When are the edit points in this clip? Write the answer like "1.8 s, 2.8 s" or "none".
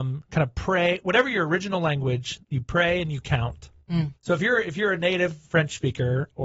2.4 s, 4.2 s